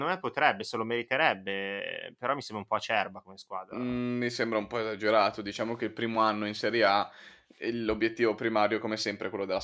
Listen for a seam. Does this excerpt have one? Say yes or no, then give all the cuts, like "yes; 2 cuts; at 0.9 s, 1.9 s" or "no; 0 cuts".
no; 0 cuts